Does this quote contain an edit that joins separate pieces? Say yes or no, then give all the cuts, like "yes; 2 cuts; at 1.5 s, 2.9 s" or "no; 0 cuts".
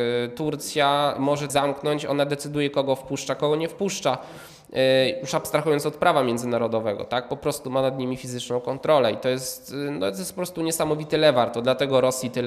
yes; 1 cut; at 1.5 s